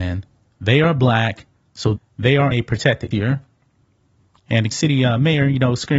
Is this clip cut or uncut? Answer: cut